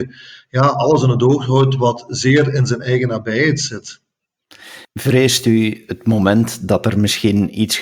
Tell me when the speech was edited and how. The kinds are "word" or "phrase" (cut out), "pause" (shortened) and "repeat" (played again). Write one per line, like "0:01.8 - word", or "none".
0:04.9 - pause